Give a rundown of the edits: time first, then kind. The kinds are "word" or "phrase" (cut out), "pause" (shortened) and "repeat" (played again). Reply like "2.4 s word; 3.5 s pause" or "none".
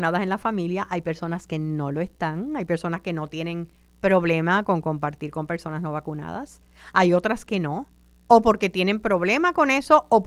none